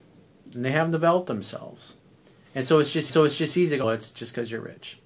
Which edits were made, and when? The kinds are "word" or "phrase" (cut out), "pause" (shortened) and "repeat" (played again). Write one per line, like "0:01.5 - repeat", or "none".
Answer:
0:03.1 - repeat
0:03.8 - word